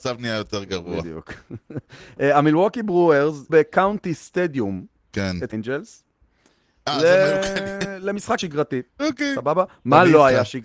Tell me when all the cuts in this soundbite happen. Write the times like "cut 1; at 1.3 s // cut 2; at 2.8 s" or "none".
cut 1; at 3.5 s // cut 2; at 5.5 s // cut 3; at 8.4 s // cut 4; at 8.9 s